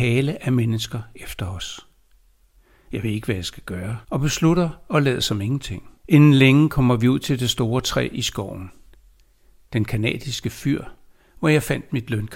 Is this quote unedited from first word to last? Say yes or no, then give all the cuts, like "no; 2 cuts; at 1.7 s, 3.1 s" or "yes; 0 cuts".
no; 2 cuts; at 4.0 s, 6.0 s